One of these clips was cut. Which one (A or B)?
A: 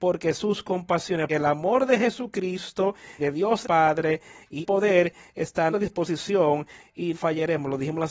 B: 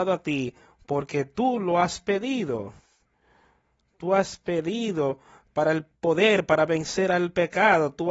A